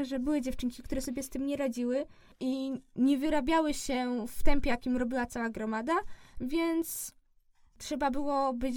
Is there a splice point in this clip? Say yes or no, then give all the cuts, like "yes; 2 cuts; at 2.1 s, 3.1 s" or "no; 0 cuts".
no; 0 cuts